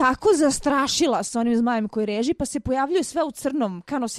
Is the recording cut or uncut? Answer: uncut